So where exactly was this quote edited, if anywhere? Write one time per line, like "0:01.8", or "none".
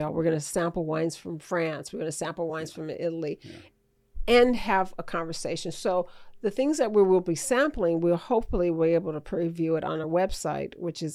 none